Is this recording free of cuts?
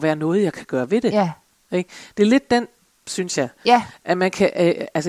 yes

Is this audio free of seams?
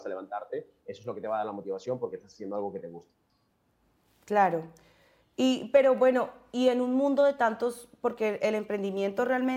yes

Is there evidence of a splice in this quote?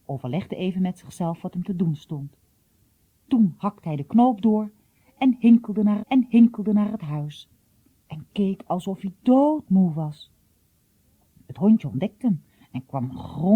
yes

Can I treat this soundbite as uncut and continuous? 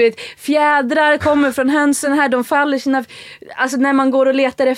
yes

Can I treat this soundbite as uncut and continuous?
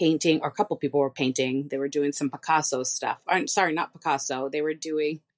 yes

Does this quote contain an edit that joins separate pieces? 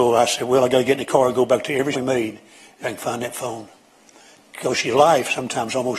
yes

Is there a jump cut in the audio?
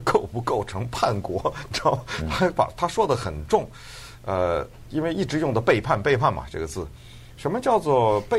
no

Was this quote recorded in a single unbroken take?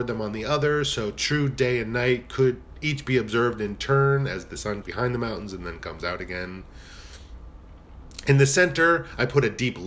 no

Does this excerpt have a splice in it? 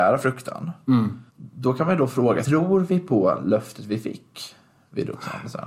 yes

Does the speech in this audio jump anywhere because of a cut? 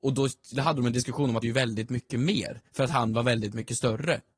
yes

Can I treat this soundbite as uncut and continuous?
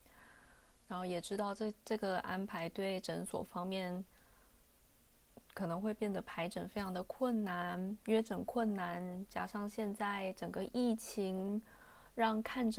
no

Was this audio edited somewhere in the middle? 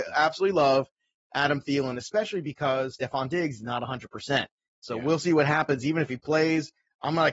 no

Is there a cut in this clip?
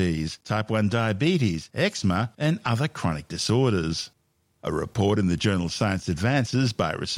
no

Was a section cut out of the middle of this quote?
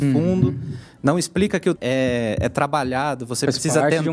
yes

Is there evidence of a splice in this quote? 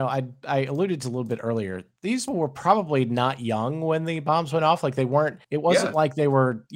yes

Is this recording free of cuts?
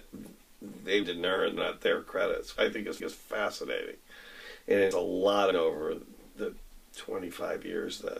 no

